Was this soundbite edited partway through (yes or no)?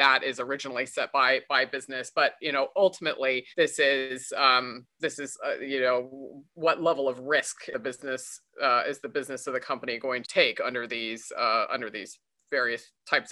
yes